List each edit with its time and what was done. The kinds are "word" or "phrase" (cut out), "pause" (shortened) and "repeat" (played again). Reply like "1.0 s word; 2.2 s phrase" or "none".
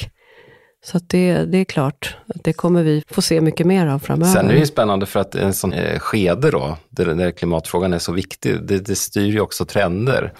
3.0 s word; 5.7 s word